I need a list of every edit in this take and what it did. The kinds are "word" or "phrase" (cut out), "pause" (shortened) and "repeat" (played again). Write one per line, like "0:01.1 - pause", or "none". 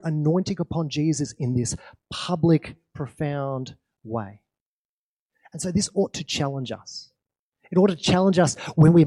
none